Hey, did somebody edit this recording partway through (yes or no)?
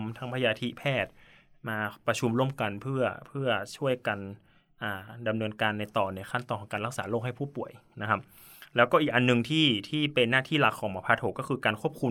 no